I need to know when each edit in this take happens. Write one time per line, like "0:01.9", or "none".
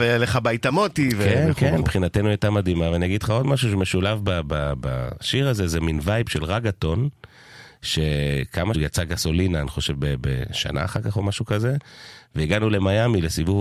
0:08.7